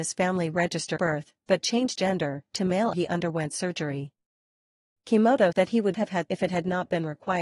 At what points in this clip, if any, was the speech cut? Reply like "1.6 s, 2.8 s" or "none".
1.0 s, 1.9 s, 2.9 s, 5.5 s, 5.9 s, 6.3 s